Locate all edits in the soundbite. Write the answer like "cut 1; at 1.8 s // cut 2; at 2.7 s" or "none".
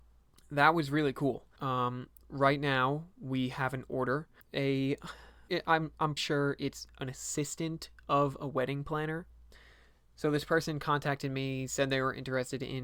cut 1; at 1.6 s // cut 2; at 4.4 s // cut 3; at 5.5 s // cut 4; at 6.2 s